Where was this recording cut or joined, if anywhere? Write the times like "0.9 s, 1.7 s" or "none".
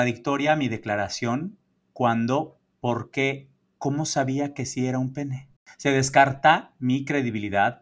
none